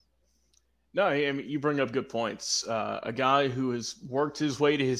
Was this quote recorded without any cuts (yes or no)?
yes